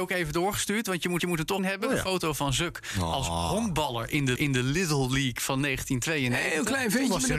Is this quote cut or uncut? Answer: cut